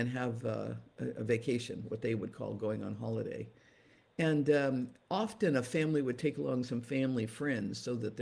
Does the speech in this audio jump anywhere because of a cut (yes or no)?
no